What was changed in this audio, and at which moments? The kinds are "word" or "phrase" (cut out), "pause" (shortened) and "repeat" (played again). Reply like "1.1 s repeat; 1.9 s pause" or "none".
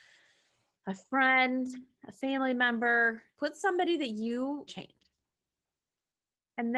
3.4 s word; 4.7 s phrase